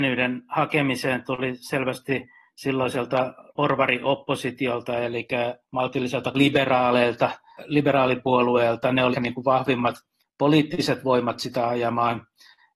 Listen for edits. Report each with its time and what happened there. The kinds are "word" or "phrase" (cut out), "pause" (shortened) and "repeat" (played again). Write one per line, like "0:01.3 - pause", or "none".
0:03.5 - pause
0:06.3 - phrase
0:09.1 - word